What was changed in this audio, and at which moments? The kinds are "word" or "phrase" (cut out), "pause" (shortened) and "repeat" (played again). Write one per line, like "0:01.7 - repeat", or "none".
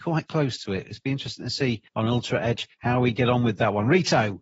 0:02.7 - pause